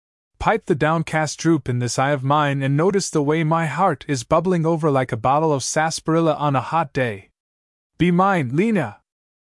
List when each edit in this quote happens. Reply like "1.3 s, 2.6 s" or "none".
none